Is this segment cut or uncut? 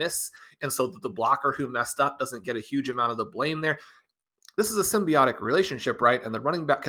uncut